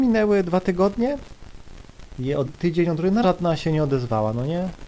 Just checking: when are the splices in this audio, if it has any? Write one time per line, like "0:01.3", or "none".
0:02.4
0:03.2